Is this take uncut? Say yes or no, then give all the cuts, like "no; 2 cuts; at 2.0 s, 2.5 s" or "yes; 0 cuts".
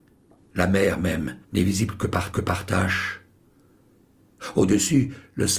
no; 2 cuts; at 1.4 s, 2.3 s